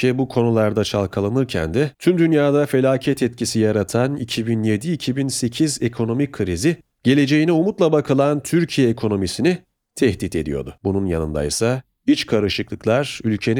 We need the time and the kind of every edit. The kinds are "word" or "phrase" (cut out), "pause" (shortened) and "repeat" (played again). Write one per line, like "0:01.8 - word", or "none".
0:01.9 - pause
0:10.8 - pause